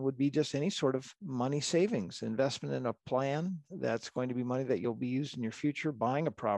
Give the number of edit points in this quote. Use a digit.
1